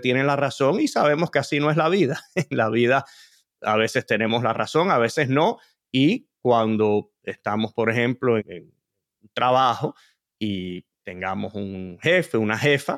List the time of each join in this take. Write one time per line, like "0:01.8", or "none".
0:08.4